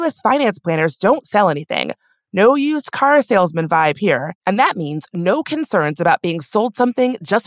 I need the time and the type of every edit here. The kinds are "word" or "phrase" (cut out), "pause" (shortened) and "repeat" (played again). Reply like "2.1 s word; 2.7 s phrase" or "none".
none